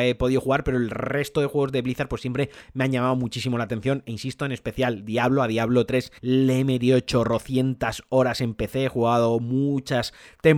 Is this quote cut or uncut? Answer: cut